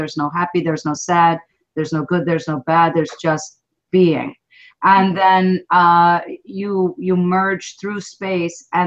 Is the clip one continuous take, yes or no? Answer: yes